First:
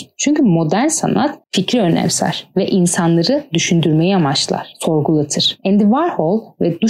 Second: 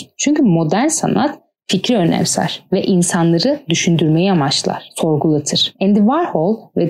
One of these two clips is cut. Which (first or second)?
first